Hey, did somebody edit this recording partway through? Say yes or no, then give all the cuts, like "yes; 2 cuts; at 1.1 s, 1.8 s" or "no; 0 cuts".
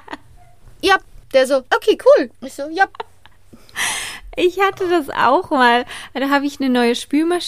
yes; 3 cuts; at 1.2 s, 1.7 s, 2.3 s